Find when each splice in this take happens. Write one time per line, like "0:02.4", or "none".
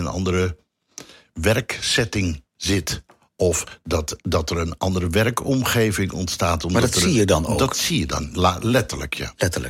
none